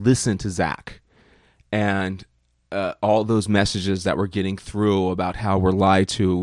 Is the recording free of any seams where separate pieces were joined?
yes; 0 cuts

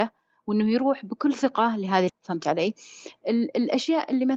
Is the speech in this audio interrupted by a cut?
yes; 1 cut; at 2.1 s

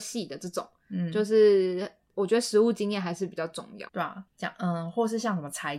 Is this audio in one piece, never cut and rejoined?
no; 2 cuts; at 3.9 s, 4.3 s

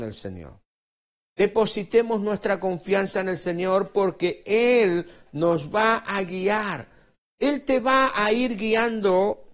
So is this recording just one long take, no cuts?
yes; 0 cuts

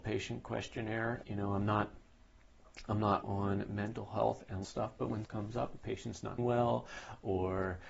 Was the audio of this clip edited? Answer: yes; 5 cuts; at 1.2 s, 3.2 s, 4.6 s, 5.3 s, 6.4 s

